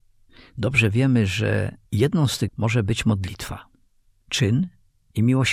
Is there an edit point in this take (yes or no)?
yes